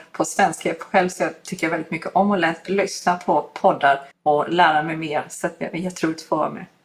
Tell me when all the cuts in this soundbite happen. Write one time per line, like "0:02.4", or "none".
0:04.1